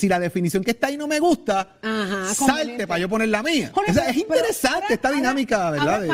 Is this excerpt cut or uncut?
uncut